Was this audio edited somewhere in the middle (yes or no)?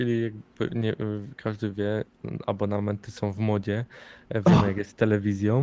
no